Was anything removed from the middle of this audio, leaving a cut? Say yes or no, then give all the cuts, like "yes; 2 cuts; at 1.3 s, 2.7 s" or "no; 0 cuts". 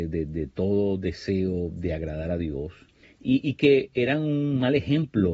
yes; 1 cut; at 3.0 s